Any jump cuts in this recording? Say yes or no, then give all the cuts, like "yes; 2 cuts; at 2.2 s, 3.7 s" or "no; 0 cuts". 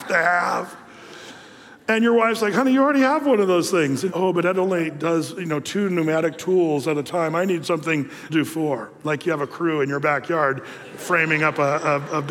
yes; 2 cuts; at 4.1 s, 8.3 s